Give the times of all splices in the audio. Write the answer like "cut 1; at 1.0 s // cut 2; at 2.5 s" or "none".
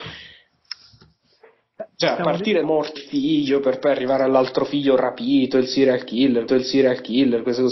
cut 1; at 2.6 s // cut 2; at 3.0 s // cut 3; at 6.5 s